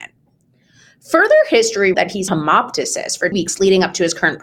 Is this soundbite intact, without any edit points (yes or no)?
no